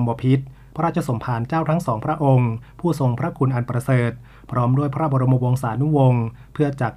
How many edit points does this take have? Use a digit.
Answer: 0